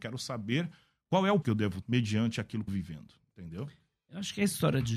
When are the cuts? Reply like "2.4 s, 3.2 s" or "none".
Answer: 1.4 s, 1.8 s, 2.7 s